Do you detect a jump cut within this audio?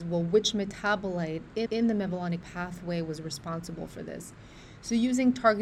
yes; 2 cuts; at 1.7 s, 2.4 s

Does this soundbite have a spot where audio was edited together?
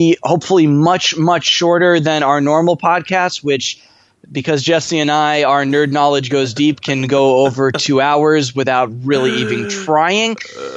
no; 0 cuts

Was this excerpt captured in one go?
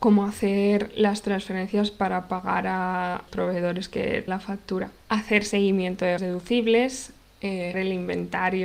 no; 5 cuts; at 3.3 s, 4.3 s, 5.0 s, 6.2 s, 7.7 s

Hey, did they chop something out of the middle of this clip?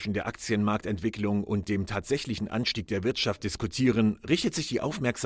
no; 0 cuts

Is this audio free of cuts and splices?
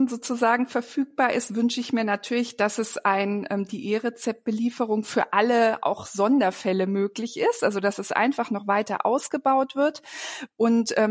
yes; 0 cuts

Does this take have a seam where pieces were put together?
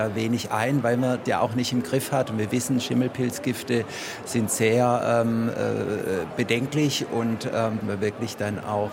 yes; 2 cuts; at 1.3 s, 7.8 s

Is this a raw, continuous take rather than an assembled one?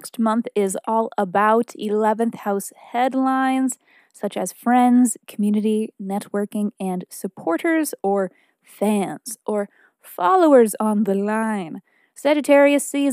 yes; 0 cuts

